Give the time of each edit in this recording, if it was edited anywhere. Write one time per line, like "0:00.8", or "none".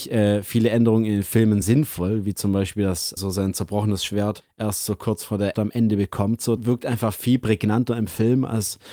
0:01.6
0:03.2
0:04.4
0:05.5
0:06.6